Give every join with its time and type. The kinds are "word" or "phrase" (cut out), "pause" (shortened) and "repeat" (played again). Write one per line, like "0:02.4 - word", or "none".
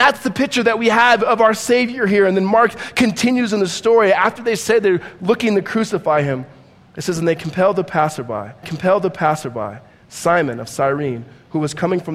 0:08.6 - repeat